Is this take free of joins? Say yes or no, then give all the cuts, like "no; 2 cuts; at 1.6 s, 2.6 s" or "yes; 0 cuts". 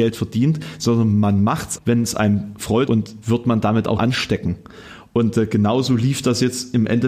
no; 4 cuts; at 1.8 s, 2.9 s, 3.2 s, 4.0 s